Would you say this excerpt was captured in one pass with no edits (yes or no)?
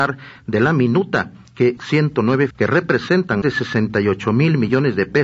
no